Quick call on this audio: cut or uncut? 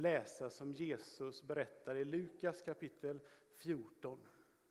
uncut